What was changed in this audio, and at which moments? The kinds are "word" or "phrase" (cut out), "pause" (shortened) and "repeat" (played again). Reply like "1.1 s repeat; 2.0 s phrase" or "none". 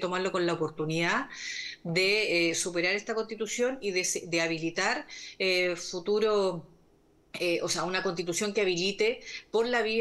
none

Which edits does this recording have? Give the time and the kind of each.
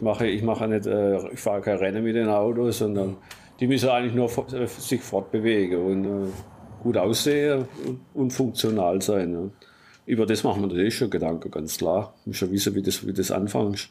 none

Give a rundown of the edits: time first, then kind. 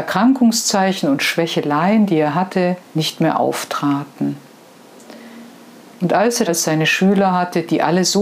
2.8 s pause; 6.5 s phrase

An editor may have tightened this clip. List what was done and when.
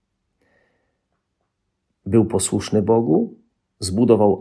none

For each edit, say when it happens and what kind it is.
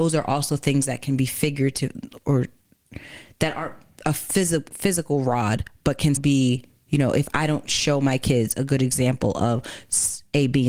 6.2 s word

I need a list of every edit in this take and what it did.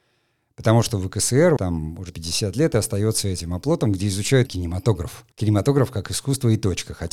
1.6 s word; 2.1 s word; 4.5 s word; 5.3 s pause

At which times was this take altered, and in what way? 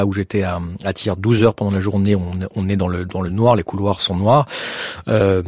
none

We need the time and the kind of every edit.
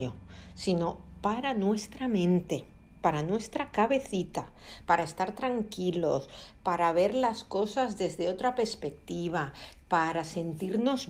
none

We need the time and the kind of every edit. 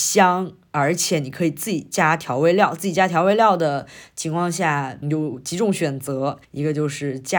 5.0 s word; 6.4 s pause

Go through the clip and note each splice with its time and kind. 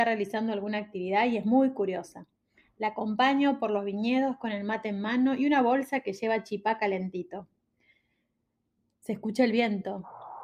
none

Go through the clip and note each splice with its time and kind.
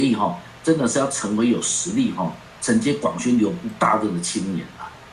none

